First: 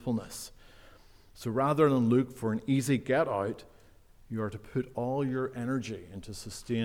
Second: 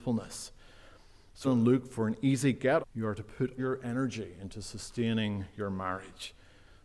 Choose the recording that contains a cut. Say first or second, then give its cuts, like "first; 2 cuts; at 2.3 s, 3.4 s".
second; 3 cuts; at 1.4 s, 2.8 s, 3.6 s